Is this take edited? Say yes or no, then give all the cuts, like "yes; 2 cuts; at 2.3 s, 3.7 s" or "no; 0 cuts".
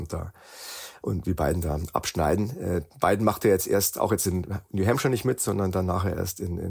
no; 0 cuts